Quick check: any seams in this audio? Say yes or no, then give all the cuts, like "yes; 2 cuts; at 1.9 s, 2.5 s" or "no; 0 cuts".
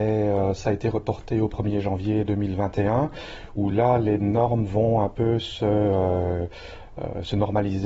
no; 0 cuts